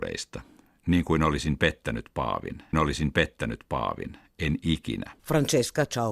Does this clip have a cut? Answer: yes; 2 cuts; at 2.7 s, 5.2 s

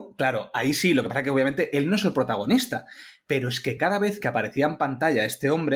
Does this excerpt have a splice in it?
no; 0 cuts

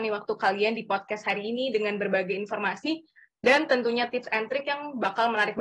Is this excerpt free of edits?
yes; 0 cuts

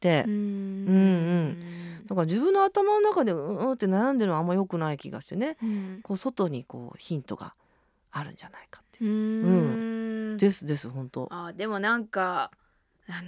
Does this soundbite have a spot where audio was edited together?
no; 0 cuts

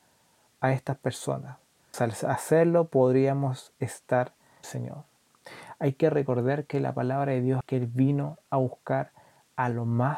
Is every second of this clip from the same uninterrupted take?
no; 3 cuts; at 1.9 s, 4.6 s, 7.6 s

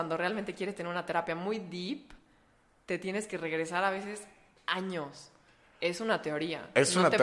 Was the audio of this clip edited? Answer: no; 0 cuts

